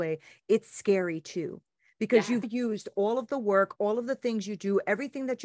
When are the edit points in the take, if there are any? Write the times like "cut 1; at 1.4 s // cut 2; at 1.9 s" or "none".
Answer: cut 1; at 2.4 s